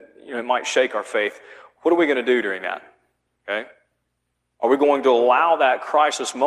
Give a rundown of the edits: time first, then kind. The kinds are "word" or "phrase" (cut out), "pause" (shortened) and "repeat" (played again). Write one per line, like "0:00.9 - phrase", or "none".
none